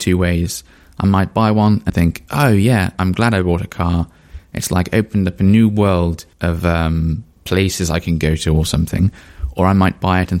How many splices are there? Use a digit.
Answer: 4